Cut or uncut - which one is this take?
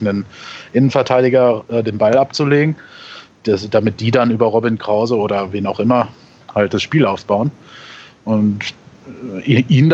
uncut